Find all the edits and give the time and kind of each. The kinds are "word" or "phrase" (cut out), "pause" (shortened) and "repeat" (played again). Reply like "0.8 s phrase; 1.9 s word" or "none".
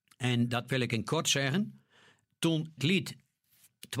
2.8 s word